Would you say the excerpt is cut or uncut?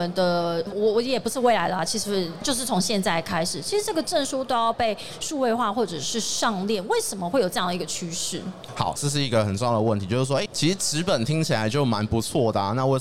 cut